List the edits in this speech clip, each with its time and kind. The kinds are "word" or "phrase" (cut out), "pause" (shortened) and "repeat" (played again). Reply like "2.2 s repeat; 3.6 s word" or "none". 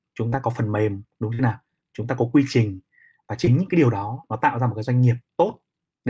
none

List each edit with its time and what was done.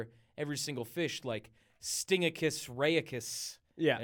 none

